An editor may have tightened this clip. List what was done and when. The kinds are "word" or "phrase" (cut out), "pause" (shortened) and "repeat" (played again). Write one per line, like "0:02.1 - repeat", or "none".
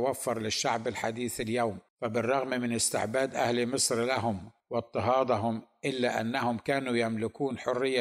0:01.9 - pause
0:04.6 - pause